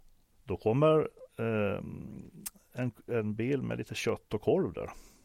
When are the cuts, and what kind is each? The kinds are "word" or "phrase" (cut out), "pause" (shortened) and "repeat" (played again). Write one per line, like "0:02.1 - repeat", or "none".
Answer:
0:01.3 - pause

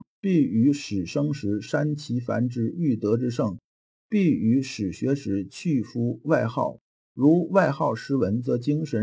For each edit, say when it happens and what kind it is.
none

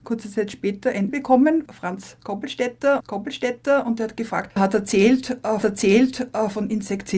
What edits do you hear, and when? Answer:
0:01.1 - word
0:01.7 - word
0:03.0 - repeat
0:04.6 - word
0:05.6 - repeat

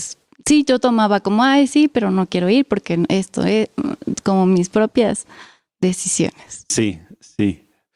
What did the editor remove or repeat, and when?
none

